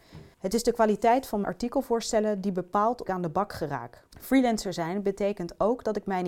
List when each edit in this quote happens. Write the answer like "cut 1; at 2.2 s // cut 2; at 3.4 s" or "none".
cut 1; at 1.4 s // cut 2; at 3.0 s // cut 3; at 4.1 s